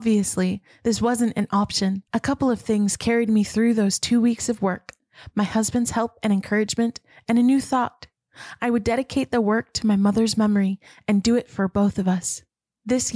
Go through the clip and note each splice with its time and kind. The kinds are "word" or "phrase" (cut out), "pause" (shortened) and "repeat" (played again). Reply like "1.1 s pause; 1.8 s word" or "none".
2.1 s pause